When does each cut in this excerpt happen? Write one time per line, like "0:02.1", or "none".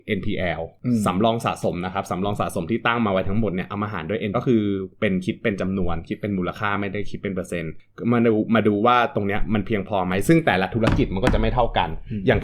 0:04.3